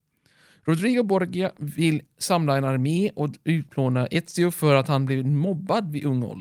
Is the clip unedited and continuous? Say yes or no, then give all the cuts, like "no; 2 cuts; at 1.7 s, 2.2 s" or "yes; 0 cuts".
yes; 0 cuts